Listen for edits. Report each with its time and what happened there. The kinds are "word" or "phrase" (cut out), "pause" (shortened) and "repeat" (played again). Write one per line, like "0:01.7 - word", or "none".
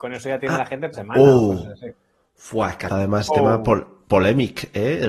0:00.9 - word
0:02.9 - word
0:03.3 - word